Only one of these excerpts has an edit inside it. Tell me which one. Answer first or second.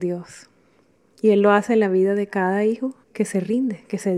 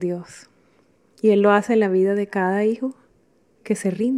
first